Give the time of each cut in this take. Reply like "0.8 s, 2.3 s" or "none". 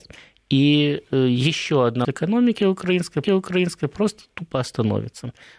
2.0 s, 3.2 s